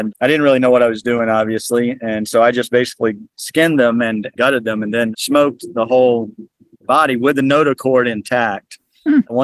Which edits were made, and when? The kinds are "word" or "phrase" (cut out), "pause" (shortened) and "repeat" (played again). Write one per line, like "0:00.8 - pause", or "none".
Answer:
none